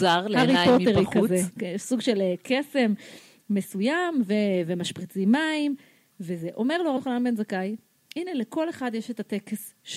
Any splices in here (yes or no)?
yes